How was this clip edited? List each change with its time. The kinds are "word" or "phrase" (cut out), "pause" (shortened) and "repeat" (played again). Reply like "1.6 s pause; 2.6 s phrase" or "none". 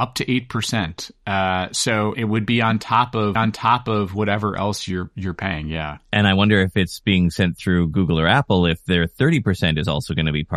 2.1 s word; 3.4 s repeat